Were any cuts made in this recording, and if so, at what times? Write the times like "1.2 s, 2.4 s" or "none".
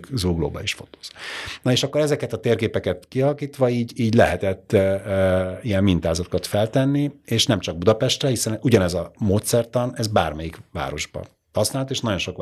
none